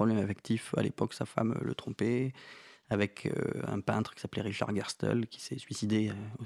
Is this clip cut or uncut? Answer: uncut